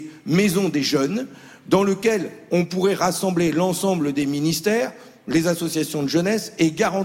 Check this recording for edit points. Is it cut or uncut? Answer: uncut